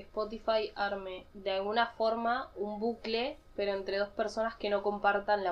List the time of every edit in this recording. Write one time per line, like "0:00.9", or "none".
none